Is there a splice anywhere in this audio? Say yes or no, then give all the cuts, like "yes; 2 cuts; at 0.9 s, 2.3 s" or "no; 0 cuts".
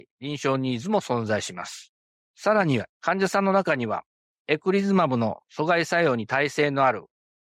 yes; 1 cut; at 2.9 s